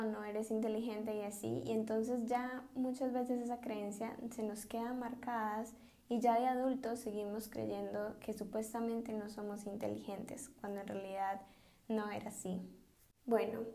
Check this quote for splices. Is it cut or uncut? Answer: uncut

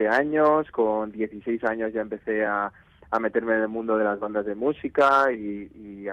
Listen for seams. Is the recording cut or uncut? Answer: uncut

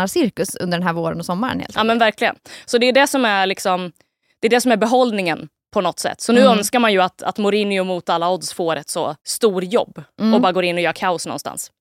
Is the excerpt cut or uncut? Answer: cut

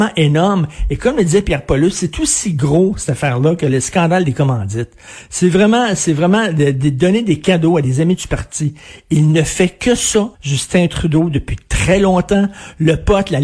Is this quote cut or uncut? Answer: cut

